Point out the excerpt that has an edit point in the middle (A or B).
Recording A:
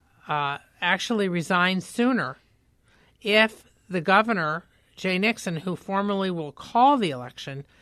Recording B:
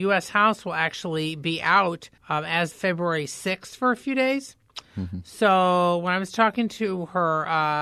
B